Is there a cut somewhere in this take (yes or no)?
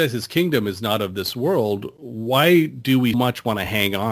yes